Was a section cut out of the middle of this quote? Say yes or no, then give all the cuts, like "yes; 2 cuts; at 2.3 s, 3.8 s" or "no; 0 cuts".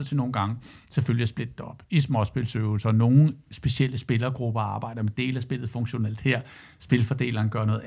no; 0 cuts